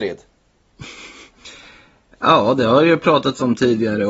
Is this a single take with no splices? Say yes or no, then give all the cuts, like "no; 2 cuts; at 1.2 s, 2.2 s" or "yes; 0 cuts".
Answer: yes; 0 cuts